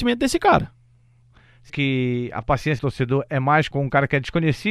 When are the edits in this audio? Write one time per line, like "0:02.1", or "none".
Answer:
0:01.7
0:02.8
0:03.7